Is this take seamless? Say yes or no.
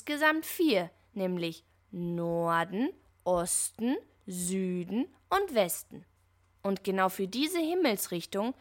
yes